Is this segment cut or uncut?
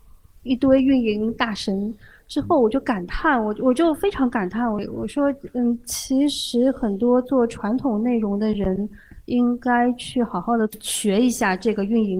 uncut